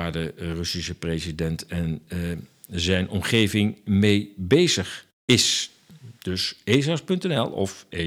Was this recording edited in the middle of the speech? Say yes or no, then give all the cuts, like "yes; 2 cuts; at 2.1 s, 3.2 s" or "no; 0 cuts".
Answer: no; 0 cuts